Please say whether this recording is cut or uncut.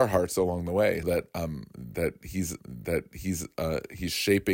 cut